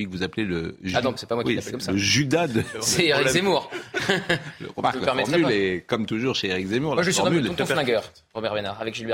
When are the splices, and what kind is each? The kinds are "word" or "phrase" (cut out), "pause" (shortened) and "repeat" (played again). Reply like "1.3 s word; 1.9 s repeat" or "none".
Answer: 1.2 s word